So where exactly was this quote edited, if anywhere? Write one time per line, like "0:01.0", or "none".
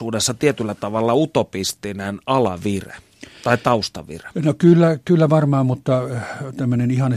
none